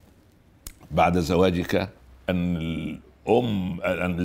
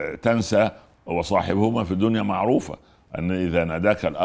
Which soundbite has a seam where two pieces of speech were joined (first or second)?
first